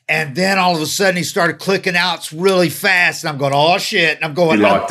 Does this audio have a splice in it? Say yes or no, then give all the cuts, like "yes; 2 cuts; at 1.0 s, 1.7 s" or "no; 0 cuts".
no; 0 cuts